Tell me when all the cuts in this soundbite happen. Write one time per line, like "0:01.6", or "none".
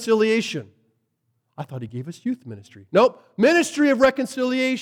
none

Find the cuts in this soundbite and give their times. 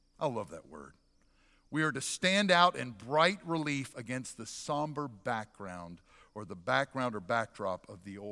none

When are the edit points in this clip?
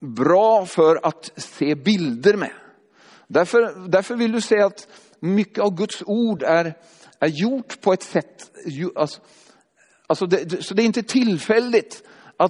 none

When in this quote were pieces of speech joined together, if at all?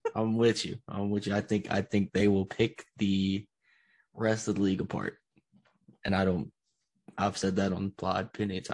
none

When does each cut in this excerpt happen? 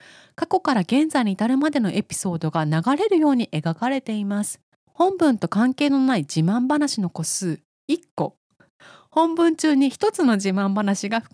none

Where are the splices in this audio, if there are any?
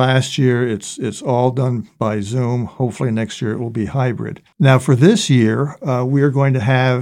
0:01.9

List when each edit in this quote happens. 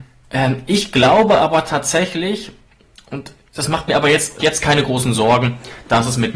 0:04.4

